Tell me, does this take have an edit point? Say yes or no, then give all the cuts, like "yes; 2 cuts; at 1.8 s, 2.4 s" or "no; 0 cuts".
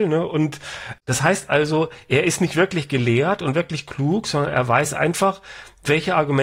no; 0 cuts